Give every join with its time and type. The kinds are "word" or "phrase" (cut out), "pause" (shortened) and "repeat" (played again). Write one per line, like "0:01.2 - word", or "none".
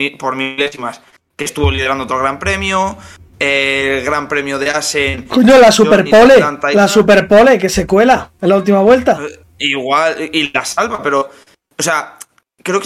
none